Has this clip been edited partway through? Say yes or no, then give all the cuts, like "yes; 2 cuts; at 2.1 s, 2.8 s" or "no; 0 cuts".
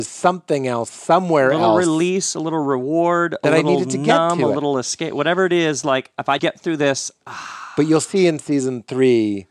yes; 1 cut; at 6.4 s